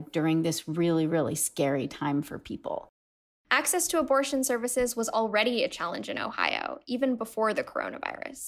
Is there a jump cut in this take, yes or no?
no